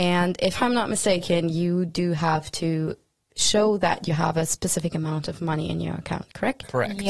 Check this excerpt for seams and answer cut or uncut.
uncut